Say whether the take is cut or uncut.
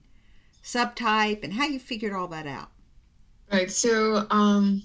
uncut